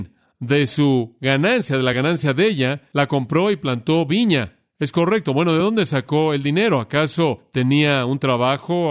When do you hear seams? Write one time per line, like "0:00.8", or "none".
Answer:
none